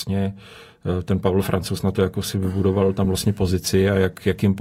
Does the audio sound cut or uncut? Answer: uncut